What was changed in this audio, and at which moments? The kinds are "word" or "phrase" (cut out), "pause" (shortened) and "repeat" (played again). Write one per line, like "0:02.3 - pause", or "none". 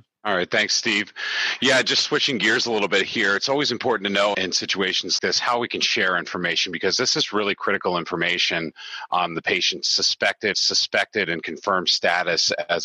0:04.3 - word
0:05.2 - word
0:10.5 - repeat

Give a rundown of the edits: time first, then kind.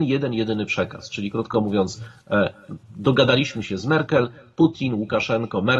none

